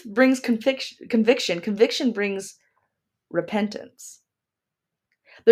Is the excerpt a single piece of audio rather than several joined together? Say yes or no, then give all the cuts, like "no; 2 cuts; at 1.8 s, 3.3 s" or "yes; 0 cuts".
yes; 0 cuts